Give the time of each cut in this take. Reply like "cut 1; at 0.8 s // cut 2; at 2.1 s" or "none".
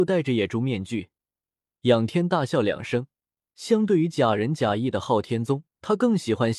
none